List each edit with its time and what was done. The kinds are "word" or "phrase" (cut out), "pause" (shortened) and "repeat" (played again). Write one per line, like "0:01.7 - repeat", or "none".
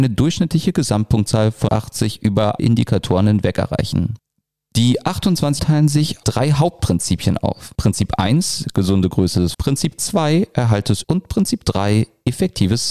0:01.7 - word
0:02.6 - word
0:05.6 - word
0:06.2 - word
0:09.5 - word
0:11.0 - word